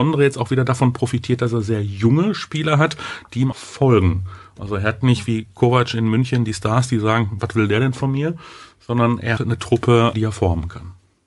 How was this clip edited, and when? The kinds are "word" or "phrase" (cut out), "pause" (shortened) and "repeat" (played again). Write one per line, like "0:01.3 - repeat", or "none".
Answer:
0:03.5 - word
0:09.4 - word